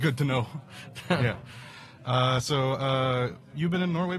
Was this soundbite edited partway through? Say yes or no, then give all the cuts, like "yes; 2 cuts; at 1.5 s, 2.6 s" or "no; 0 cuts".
no; 0 cuts